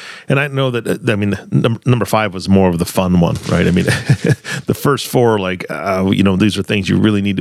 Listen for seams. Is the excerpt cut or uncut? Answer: uncut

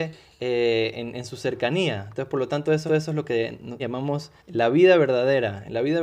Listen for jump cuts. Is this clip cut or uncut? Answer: cut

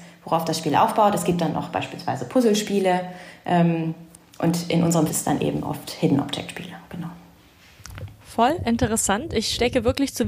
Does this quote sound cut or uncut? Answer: cut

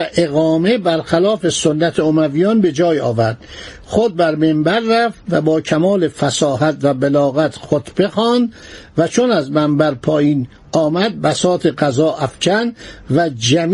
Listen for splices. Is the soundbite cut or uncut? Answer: uncut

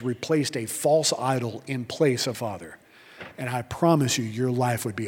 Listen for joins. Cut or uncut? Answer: cut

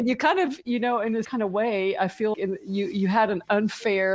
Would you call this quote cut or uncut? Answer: cut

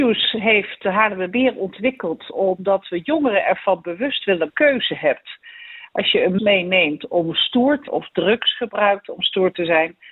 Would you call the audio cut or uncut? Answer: cut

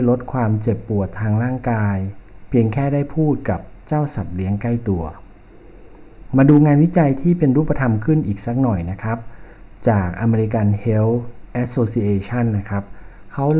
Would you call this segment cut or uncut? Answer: uncut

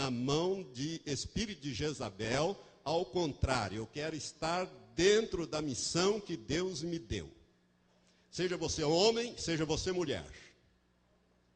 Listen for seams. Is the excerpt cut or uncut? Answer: uncut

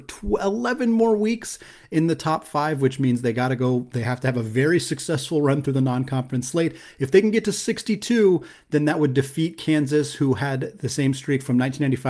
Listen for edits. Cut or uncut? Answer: uncut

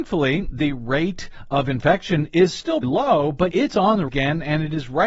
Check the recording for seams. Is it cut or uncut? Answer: cut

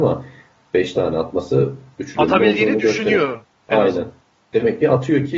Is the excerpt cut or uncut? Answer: uncut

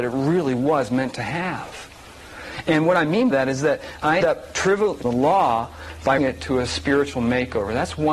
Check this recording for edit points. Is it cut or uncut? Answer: cut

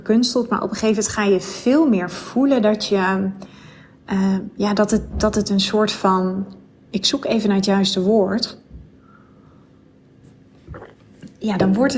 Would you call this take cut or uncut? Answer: uncut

